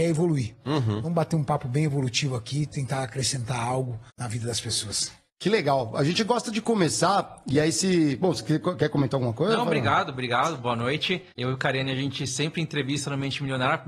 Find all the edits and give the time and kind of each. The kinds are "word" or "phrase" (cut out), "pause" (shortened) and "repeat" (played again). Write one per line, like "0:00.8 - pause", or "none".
0:04.1 - pause
0:11.3 - pause